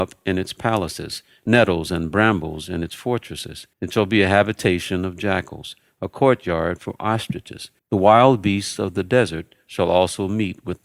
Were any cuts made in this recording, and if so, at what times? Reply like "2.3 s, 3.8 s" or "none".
3.7 s, 7.8 s